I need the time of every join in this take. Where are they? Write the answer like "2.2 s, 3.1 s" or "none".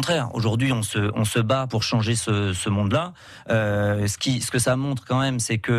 1.7 s